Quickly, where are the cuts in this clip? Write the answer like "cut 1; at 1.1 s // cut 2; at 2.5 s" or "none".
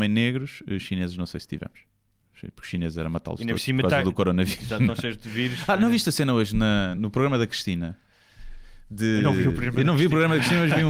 cut 1; at 7.0 s